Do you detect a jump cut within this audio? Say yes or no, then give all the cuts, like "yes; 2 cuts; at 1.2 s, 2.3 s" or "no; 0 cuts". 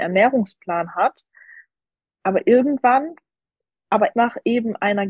yes; 1 cut; at 4.1 s